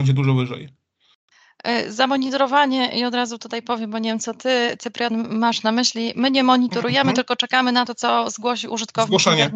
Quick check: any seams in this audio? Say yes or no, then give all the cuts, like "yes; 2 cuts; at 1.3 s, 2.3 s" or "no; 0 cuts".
no; 0 cuts